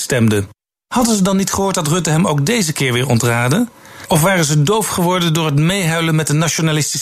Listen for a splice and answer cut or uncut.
uncut